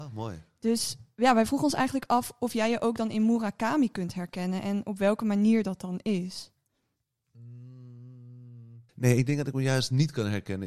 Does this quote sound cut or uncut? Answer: cut